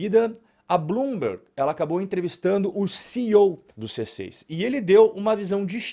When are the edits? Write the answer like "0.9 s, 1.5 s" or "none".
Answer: 3.7 s